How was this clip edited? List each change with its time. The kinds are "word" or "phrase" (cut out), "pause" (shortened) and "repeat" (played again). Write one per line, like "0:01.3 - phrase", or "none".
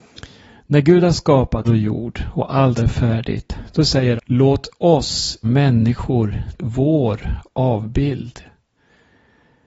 0:01.6 - word
0:02.8 - word
0:04.2 - word
0:05.4 - word
0:06.6 - word